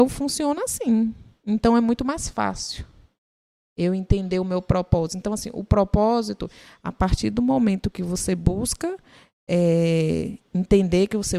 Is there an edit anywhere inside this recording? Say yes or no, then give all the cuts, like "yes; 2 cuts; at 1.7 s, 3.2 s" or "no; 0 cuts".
no; 0 cuts